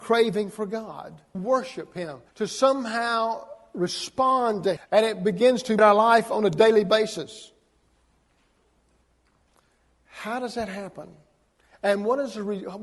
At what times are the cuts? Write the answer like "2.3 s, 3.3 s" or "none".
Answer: 1.3 s, 2.3 s, 4.8 s, 5.8 s